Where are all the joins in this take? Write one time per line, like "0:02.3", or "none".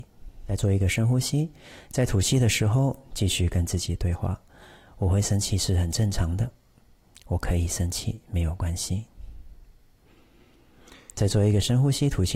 none